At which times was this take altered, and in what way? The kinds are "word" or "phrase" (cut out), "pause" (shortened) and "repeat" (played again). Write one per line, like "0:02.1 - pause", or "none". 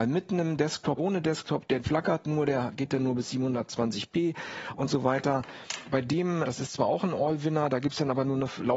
0:01.0 - word
0:01.8 - word
0:06.4 - word